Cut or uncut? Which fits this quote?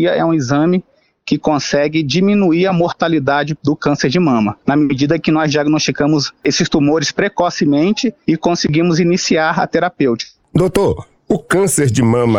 uncut